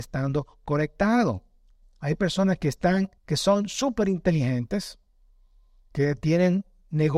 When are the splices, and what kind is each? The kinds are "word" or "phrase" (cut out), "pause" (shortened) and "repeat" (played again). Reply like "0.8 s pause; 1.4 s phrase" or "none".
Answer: 3.2 s pause